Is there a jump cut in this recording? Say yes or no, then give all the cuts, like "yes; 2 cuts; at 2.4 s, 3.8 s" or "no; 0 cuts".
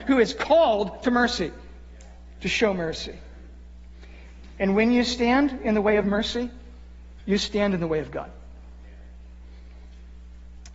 no; 0 cuts